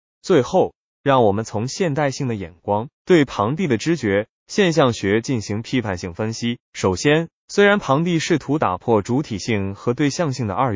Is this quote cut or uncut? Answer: cut